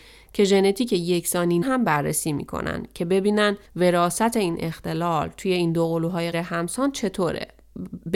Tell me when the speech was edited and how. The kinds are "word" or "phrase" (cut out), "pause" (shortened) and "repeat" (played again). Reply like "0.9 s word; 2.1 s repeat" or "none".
1.6 s word; 3.6 s pause; 6.3 s word